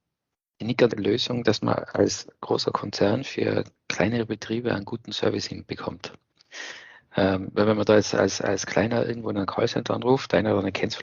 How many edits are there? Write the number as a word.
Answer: one